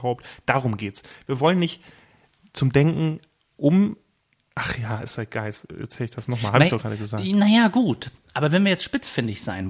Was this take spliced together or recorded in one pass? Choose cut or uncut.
uncut